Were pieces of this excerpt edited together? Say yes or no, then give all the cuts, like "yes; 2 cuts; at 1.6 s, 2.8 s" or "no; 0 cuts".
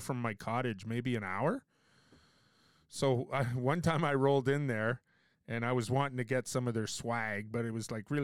no; 0 cuts